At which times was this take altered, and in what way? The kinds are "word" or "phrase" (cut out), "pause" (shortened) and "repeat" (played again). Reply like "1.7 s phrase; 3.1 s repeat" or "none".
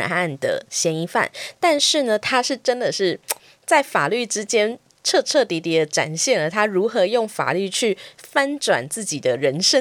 none